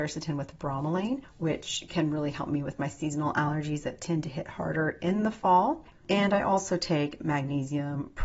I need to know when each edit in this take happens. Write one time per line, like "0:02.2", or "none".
none